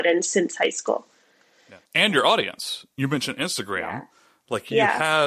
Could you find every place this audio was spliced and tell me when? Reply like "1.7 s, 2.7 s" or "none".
1.9 s